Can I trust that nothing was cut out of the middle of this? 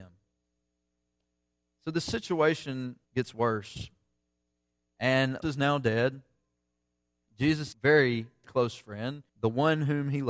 no; 5 cuts; at 3.0 s, 5.4 s, 7.7 s, 8.4 s, 9.3 s

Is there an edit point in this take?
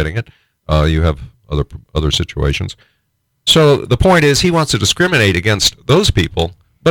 no; 0 cuts

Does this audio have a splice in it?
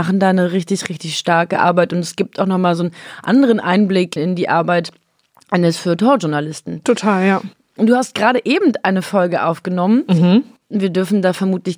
yes; 1 cut; at 4.2 s

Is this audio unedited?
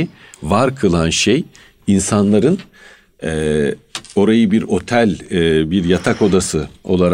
yes; 0 cuts

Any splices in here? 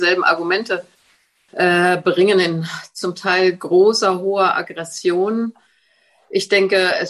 no; 0 cuts

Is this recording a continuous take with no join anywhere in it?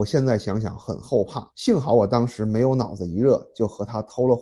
no; 1 cut; at 1.5 s

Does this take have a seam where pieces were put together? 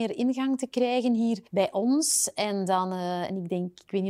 yes; 1 cut; at 1.5 s

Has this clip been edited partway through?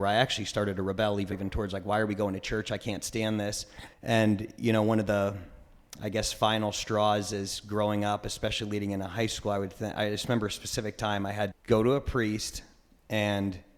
yes; 3 cuts; at 1.3 s, 3.9 s, 11.5 s

